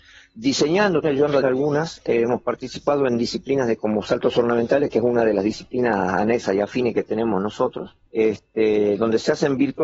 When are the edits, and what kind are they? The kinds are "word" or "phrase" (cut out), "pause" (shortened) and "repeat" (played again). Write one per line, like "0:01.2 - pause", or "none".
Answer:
0:01.0 - word
0:01.4 - word
0:08.1 - pause